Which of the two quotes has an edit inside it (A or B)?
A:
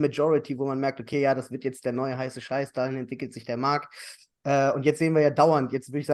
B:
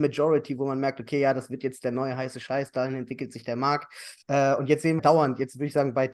B